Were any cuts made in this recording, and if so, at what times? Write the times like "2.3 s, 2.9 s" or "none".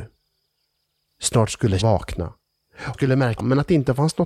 1.8 s, 2.9 s, 3.4 s